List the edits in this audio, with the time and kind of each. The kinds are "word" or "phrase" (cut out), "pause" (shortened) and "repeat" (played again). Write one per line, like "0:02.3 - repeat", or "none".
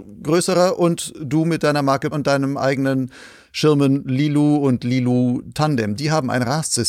0:02.1 - word